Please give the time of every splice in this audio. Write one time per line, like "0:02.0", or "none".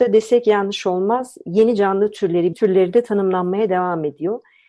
0:02.5